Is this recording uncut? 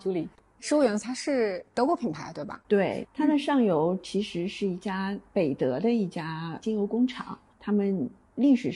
no; 1 cut; at 2.6 s

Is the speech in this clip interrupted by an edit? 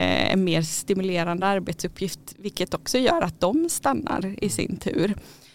no; 0 cuts

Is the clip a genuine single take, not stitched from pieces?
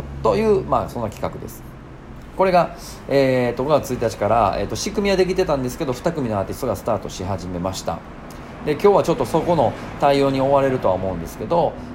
yes; 0 cuts

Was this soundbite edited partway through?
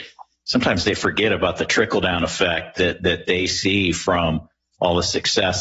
no; 0 cuts

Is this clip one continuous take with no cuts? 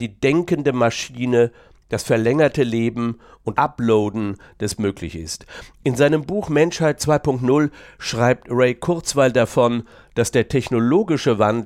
no; 2 cuts; at 3.5 s, 4.8 s

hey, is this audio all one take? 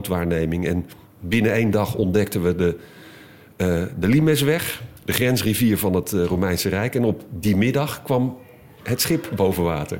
no; 1 cut; at 5.0 s

